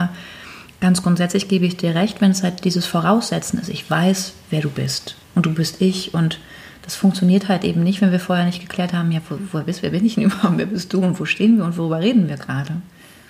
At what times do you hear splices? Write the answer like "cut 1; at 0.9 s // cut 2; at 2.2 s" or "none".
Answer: cut 1; at 5.2 s